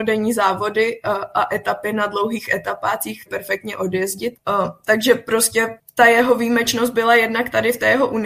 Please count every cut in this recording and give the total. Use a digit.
1